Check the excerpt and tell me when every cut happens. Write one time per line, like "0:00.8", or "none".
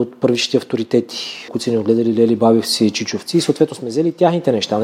0:01.5